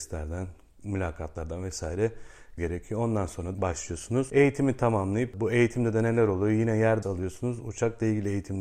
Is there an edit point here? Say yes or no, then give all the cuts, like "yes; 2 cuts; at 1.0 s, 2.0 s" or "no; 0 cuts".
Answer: yes; 3 cuts; at 2.6 s, 3.5 s, 7.0 s